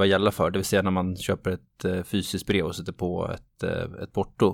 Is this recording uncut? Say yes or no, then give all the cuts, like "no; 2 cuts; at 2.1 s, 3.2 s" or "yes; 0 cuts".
yes; 0 cuts